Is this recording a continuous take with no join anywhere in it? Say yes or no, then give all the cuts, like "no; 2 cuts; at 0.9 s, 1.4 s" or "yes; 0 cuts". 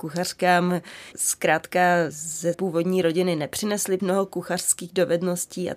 no; 4 cuts; at 1.1 s, 2.1 s, 2.5 s, 4.0 s